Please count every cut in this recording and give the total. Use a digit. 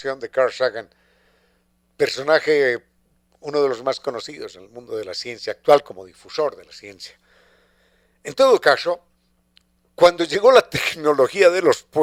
0